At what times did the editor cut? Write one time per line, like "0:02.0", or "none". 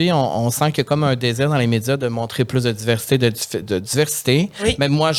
0:03.6